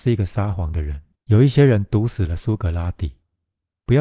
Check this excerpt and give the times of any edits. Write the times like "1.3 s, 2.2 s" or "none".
1.1 s